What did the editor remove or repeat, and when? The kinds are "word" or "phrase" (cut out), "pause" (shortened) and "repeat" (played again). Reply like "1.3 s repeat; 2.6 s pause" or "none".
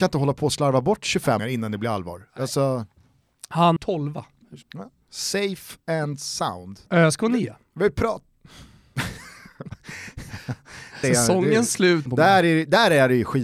1.4 s word; 3.8 s phrase; 4.6 s pause; 11.0 s word; 12.1 s phrase